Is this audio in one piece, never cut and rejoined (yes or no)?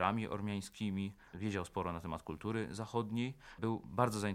yes